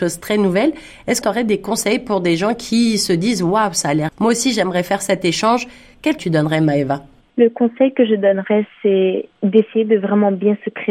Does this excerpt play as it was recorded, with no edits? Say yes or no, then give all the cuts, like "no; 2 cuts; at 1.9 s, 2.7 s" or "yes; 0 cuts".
no; 3 cuts; at 1.2 s, 4.1 s, 6.2 s